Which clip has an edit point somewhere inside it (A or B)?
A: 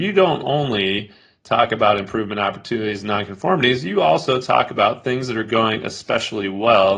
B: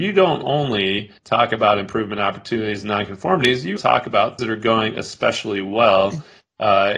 B